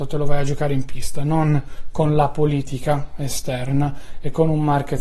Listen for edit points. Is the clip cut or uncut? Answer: uncut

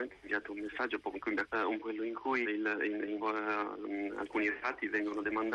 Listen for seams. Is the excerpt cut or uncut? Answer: cut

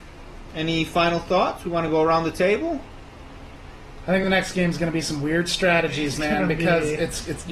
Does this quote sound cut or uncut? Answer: uncut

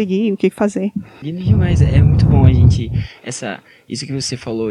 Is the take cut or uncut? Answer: uncut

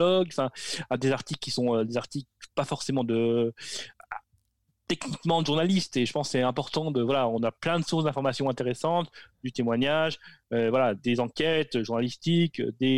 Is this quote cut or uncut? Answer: uncut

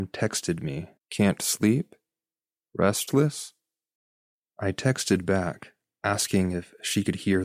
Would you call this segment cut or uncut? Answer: cut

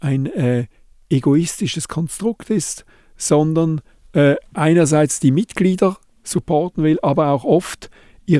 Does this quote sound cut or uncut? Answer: uncut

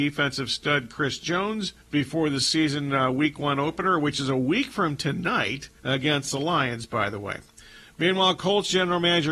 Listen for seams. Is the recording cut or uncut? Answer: cut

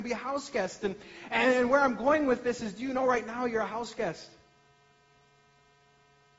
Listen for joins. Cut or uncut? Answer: uncut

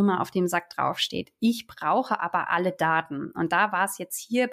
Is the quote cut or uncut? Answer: uncut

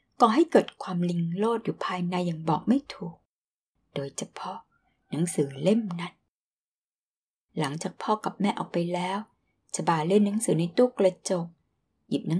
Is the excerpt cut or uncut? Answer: uncut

